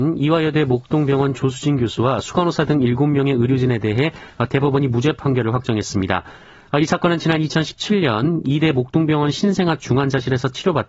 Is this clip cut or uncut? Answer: uncut